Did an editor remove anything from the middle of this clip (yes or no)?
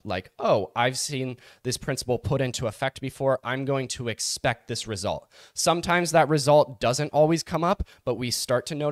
no